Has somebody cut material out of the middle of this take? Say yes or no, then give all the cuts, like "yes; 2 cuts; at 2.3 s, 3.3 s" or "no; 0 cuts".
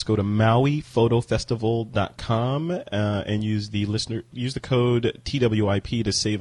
no; 0 cuts